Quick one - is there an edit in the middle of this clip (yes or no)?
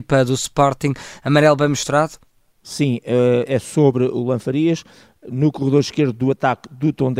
no